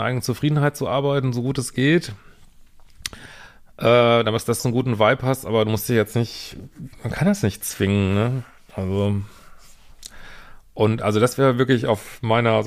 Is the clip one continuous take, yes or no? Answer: no